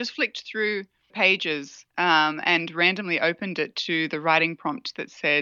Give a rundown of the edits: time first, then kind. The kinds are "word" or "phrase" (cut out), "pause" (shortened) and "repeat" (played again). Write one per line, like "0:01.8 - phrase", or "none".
0:01.1 - word
0:01.9 - pause